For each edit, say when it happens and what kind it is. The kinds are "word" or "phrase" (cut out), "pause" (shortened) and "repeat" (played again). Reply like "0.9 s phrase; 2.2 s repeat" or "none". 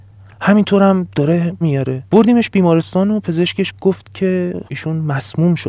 1.6 s word; 2.1 s pause; 4.7 s word